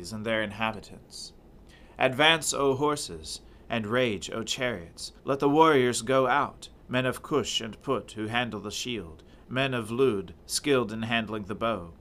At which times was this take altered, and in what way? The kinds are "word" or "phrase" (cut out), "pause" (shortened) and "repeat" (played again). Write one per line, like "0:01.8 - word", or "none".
0:05.2 - pause
0:06.8 - pause
0:10.4 - pause